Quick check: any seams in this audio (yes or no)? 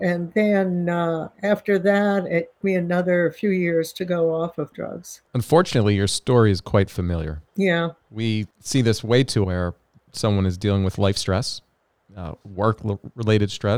yes